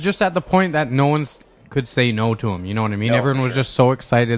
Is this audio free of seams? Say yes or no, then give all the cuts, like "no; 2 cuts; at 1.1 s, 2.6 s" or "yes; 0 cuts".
yes; 0 cuts